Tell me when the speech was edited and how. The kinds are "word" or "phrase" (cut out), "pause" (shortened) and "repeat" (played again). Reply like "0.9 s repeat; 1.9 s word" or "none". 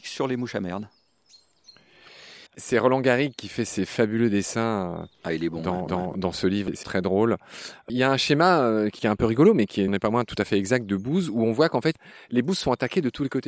2.5 s pause; 5.9 s repeat; 6.8 s word; 9.9 s word

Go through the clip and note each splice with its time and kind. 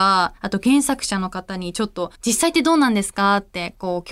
2.2 s pause

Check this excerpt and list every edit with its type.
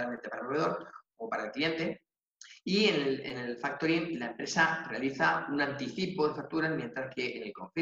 none

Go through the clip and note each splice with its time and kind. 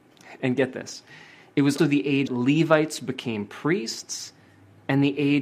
1.8 s word; 2.3 s word

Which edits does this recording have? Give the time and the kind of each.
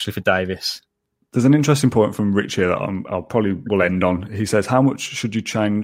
none

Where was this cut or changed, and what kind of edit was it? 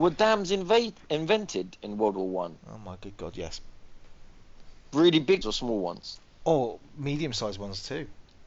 5.4 s word

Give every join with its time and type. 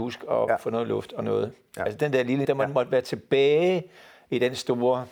2.4 s word

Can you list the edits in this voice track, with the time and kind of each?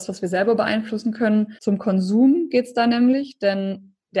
1.6 s pause

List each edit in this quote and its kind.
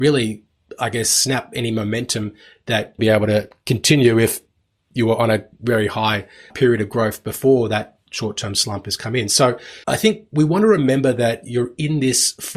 3.0 s phrase; 6.5 s word; 8.1 s pause; 9.8 s pause

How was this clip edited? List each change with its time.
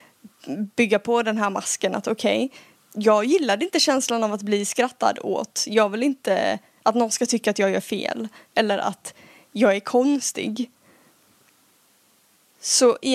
2.8 s pause

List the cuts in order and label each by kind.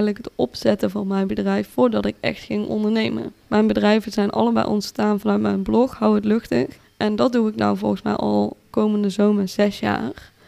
3.4 s pause; 6.8 s pause

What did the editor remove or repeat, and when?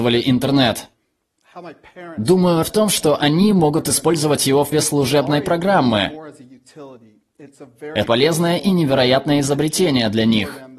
2.6 s word; 4.7 s word; 8.1 s word

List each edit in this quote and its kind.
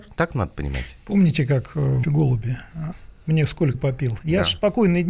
2.0 s word; 2.9 s word; 3.7 s word

